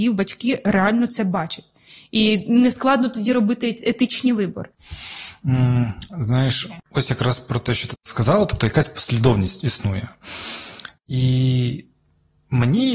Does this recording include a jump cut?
no; 0 cuts

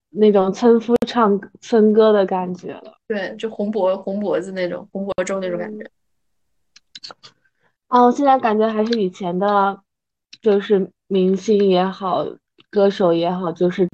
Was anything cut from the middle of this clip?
no; 0 cuts

